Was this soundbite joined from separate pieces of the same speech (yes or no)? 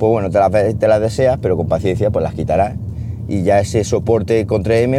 no